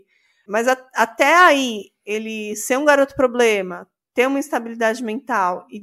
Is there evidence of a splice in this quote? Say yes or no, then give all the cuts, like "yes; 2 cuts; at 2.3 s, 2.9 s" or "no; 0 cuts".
no; 0 cuts